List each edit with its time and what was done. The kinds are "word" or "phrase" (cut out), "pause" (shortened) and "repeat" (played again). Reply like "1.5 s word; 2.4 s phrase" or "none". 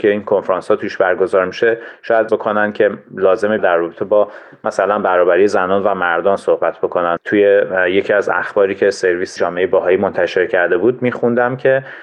2.3 s word; 3.6 s word; 7.2 s word; 9.4 s word